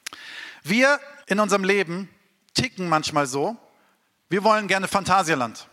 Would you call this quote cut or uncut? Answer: cut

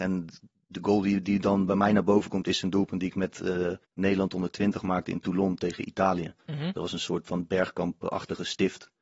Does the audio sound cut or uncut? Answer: cut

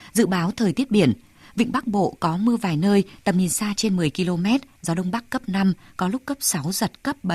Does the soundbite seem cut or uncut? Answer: uncut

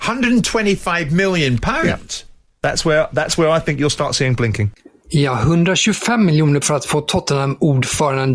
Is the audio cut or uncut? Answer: cut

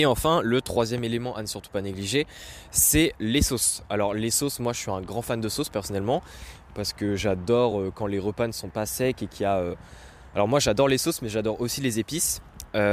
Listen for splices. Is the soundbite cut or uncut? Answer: uncut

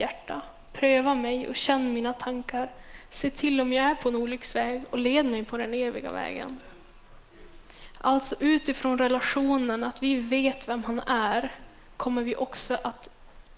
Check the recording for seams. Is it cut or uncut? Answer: uncut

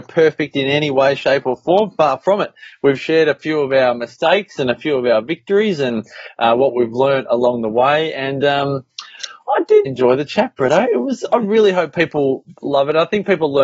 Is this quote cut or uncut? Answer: cut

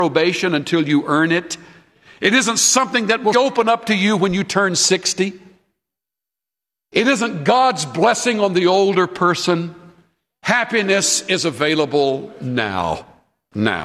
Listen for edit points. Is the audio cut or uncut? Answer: cut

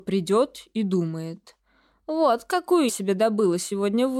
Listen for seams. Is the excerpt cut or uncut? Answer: cut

